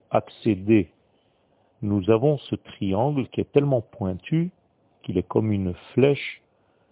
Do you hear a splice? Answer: no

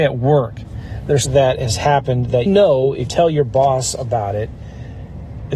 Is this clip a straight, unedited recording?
no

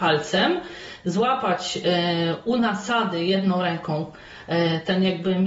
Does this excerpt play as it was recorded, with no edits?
yes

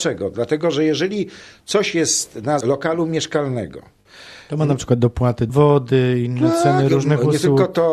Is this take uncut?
no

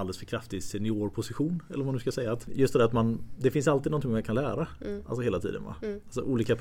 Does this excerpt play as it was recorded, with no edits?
yes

